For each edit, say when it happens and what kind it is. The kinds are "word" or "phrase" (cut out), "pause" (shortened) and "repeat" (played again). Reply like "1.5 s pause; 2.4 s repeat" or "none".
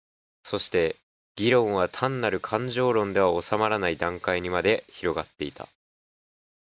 1.2 s pause